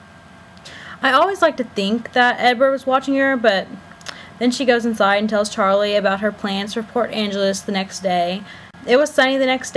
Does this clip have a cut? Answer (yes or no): no